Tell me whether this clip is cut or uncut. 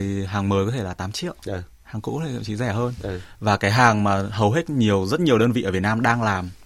uncut